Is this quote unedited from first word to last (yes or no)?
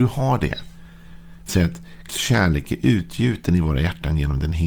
no